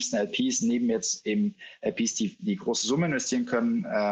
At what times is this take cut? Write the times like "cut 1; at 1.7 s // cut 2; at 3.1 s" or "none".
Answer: none